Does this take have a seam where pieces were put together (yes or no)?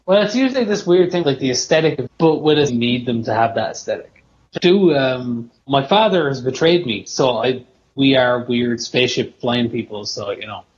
yes